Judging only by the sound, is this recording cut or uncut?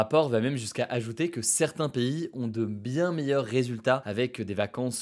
uncut